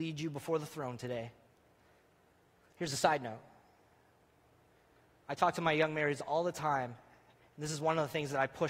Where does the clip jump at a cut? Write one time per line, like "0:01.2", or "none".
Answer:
none